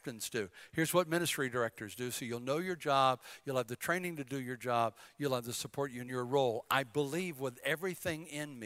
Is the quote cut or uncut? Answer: cut